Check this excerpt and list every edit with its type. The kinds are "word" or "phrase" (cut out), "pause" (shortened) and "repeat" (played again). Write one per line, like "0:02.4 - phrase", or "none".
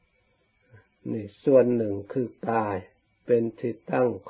none